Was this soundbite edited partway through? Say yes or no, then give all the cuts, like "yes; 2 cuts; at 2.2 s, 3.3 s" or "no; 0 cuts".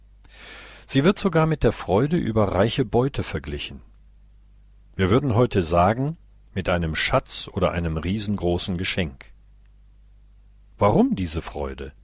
no; 0 cuts